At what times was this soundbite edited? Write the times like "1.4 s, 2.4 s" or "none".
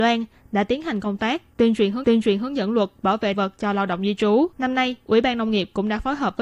2.0 s, 3.3 s, 4.5 s